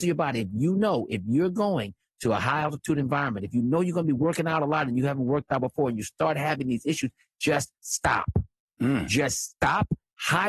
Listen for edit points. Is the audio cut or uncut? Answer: uncut